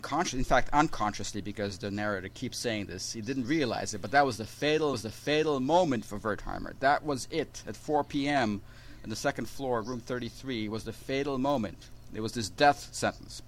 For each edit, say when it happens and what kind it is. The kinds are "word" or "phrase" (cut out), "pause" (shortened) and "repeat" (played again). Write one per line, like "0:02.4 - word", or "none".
0:03.4 - word
0:04.9 - repeat